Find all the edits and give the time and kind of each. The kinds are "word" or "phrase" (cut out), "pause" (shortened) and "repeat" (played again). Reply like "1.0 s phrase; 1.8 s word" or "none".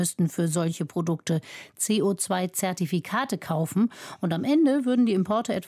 none